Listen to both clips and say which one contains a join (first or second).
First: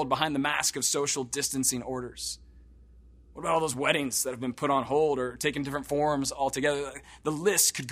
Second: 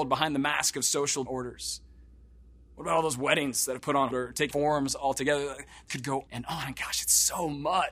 second